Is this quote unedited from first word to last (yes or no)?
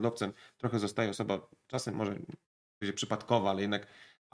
yes